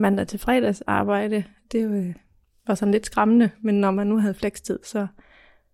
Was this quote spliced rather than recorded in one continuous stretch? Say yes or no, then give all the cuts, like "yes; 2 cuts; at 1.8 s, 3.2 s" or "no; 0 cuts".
no; 0 cuts